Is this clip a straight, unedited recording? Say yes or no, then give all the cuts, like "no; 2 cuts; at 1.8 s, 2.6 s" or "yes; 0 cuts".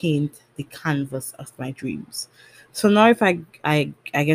yes; 0 cuts